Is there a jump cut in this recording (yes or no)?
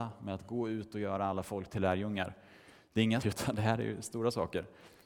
yes